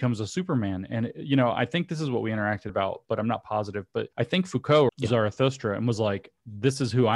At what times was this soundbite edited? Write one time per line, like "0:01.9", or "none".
0:02.7
0:04.1
0:04.9